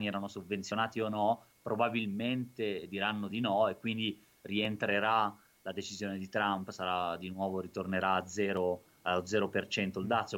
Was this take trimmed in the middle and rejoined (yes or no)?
no